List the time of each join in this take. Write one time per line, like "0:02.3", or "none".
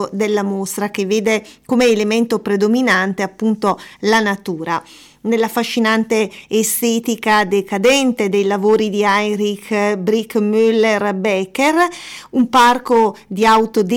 none

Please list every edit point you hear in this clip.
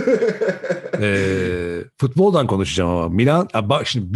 0:01.9

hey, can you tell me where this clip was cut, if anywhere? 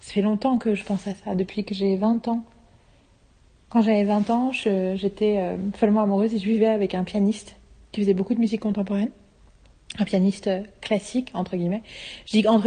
none

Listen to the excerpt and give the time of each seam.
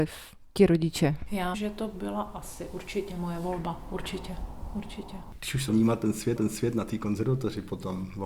0:01.5
0:05.7
0:06.4

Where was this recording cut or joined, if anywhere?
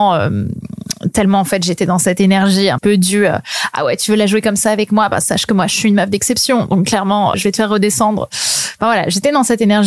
0:02.8
0:07.3

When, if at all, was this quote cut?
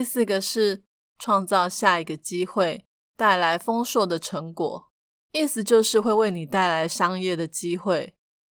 none

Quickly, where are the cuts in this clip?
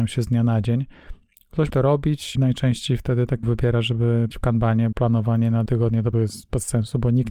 0:01.7
0:02.3
0:03.4
0:04.3
0:04.9
0:05.7
0:06.1

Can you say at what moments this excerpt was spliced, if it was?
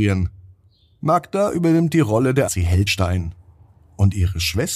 0:02.5
0:02.9

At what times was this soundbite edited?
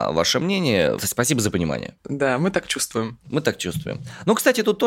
none

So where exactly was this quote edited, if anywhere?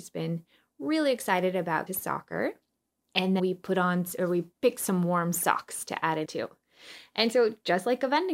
0:01.9
0:03.4
0:04.5
0:06.2

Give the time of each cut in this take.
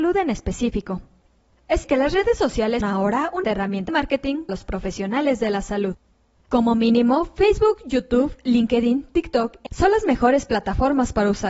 0:01.8
0:02.8
0:03.4
0:03.9
0:04.5
0:09.7

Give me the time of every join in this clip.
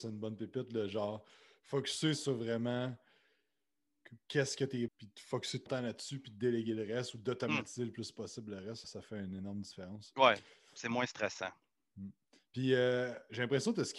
0:04.9
0:05.7
0:08.8

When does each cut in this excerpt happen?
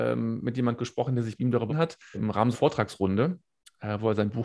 0:01.4
0:01.7
0:02.1
0:02.5

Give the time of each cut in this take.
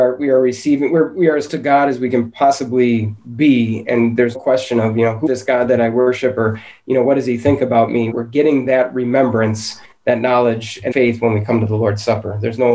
0:01.5
0:03.8
0:04.3
0:05.3
0:08.1
0:10.9

